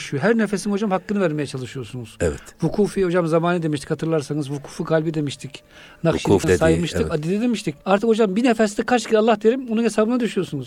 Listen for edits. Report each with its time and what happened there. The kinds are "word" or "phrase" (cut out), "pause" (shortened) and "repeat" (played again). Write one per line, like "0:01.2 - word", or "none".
0:06.4 - word
0:07.8 - pause